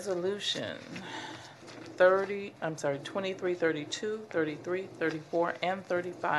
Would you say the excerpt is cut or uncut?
cut